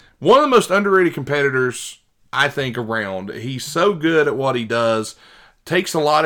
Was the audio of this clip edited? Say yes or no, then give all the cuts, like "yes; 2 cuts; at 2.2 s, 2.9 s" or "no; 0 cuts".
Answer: no; 0 cuts